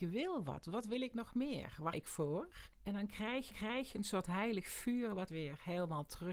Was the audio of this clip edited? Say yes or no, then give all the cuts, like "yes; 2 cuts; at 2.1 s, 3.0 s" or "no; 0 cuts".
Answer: yes; 4 cuts; at 1.9 s, 2.7 s, 3.5 s, 5.3 s